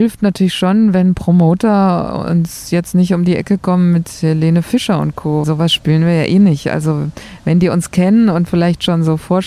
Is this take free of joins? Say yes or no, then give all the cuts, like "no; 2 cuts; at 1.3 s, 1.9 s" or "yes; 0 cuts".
no; 1 cut; at 5.4 s